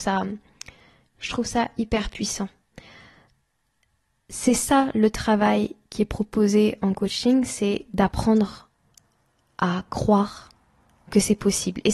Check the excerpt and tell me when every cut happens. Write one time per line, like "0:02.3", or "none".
none